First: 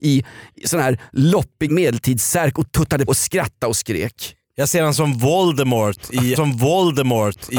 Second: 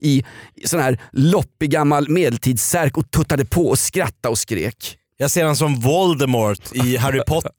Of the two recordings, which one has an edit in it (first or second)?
first